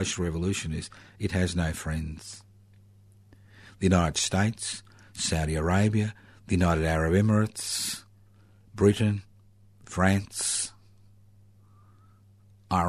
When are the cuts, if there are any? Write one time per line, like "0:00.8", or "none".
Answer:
none